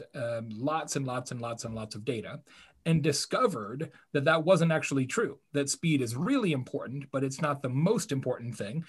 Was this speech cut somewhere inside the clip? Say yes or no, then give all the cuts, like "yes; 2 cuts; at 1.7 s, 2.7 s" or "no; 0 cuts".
no; 0 cuts